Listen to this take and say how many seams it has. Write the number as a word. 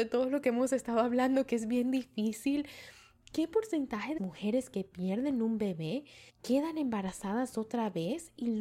two